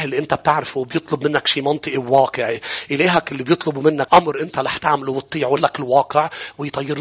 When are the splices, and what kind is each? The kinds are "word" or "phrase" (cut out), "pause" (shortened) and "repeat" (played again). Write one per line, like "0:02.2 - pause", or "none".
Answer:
0:04.1 - word
0:05.6 - word